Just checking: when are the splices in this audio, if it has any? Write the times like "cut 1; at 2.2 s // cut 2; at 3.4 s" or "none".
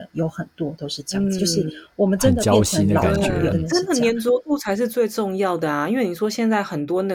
cut 1; at 3.5 s